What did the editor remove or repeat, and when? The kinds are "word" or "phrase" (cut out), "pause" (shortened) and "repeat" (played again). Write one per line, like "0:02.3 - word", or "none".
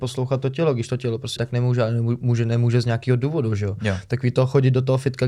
0:01.4 - word